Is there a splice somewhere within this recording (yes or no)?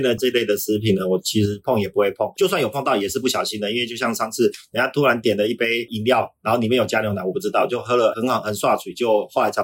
yes